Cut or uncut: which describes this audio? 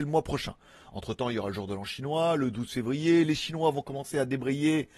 uncut